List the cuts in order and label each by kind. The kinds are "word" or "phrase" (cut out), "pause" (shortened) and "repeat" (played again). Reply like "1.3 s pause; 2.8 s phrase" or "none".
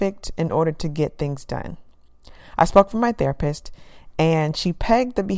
none